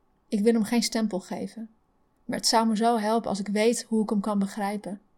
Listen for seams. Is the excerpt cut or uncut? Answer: uncut